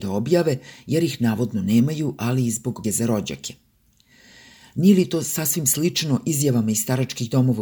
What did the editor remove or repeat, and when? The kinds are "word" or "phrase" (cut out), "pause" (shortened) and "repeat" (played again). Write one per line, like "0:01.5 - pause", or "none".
0:02.8 - word